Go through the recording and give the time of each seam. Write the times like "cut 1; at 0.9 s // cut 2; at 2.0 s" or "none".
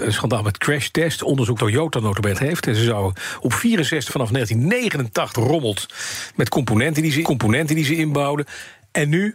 cut 1; at 1.6 s // cut 2; at 2.3 s // cut 3; at 4.1 s // cut 4; at 5.3 s // cut 5; at 7.2 s